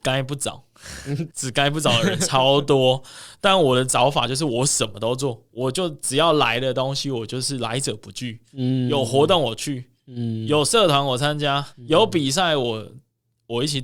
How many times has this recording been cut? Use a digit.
3